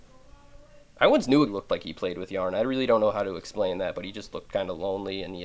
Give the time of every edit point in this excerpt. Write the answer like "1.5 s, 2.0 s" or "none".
1.5 s